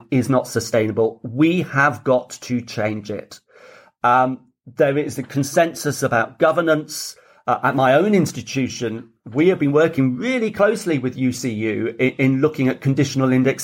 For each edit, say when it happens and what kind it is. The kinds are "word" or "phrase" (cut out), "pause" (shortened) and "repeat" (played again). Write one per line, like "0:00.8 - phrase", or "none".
none